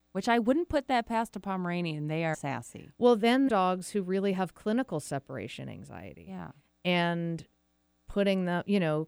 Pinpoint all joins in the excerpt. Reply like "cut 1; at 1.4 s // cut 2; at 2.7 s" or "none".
cut 1; at 2.3 s // cut 2; at 3.5 s